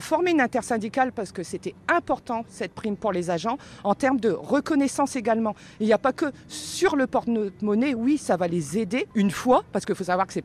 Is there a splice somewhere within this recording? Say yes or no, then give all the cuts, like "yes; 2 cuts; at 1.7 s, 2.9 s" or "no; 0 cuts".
no; 0 cuts